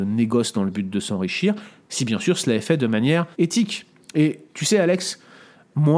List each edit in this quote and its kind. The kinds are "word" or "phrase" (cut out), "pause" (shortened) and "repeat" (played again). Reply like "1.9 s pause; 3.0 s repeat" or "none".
3.3 s pause